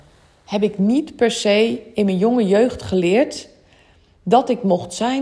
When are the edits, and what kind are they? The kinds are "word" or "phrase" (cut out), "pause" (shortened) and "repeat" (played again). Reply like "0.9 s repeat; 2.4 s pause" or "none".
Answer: none